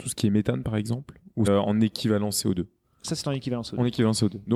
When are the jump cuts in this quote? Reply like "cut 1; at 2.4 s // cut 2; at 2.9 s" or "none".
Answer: cut 1; at 1.5 s

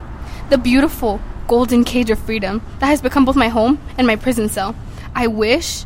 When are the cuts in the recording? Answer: none

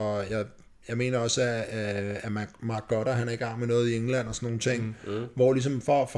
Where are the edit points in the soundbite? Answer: none

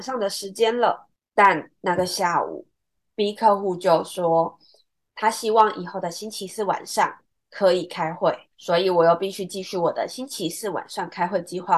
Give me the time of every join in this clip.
none

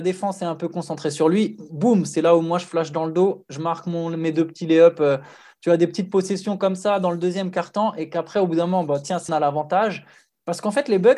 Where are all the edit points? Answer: cut 1; at 9.3 s

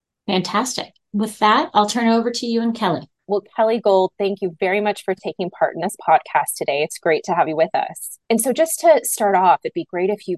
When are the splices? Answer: cut 1; at 3.2 s // cut 2; at 8.2 s

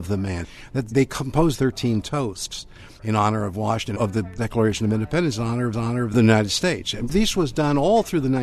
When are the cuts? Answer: cut 1; at 0.9 s // cut 2; at 1.5 s // cut 3; at 3.9 s // cut 4; at 5.7 s

